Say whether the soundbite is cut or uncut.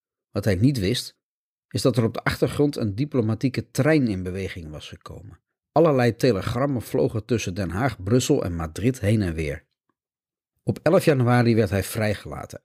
uncut